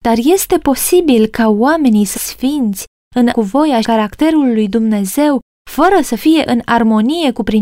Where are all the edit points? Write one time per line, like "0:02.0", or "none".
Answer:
0:02.1
0:03.3
0:03.8